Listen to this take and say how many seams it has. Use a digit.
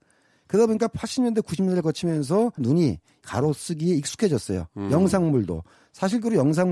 2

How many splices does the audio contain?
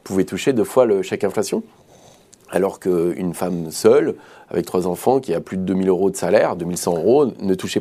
0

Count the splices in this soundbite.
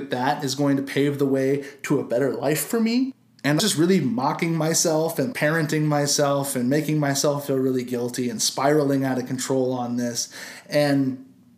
2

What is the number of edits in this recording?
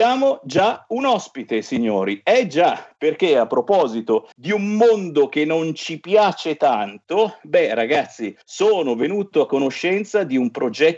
2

